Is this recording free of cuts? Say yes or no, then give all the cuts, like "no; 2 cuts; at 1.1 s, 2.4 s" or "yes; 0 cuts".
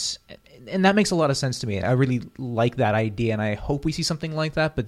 no; 1 cut; at 1.8 s